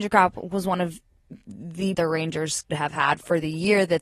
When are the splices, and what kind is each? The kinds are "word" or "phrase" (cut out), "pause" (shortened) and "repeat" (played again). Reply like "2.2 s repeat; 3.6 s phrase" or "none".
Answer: 1.9 s phrase; 2.7 s word